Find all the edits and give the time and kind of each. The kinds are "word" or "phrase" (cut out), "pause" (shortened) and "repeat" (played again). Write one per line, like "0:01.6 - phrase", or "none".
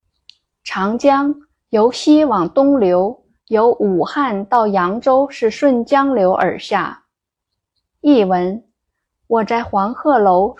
none